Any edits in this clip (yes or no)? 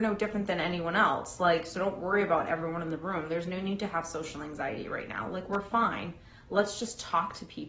no